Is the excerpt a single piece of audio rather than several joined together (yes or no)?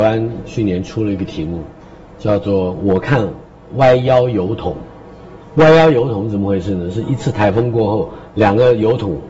no